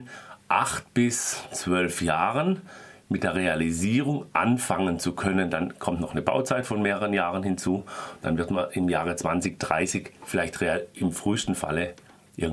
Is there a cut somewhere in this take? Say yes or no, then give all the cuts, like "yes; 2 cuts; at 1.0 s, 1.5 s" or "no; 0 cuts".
no; 0 cuts